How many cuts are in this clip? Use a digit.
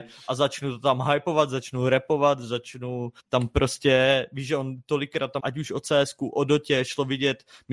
2